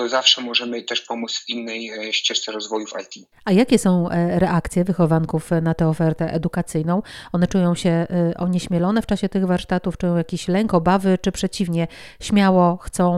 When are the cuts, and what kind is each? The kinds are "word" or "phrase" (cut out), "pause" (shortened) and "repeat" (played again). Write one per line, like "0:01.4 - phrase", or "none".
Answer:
0:03.3 - pause